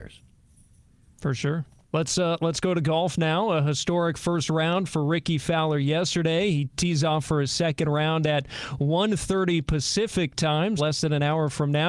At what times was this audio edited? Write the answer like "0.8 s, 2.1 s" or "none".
1.8 s, 10.8 s